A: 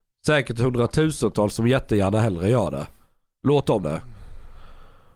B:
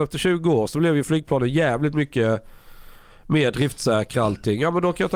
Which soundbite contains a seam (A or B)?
A